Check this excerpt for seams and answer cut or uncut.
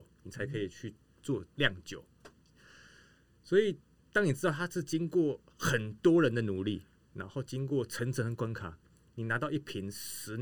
uncut